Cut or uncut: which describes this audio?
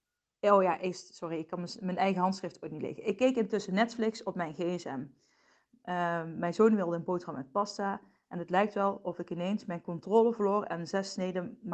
uncut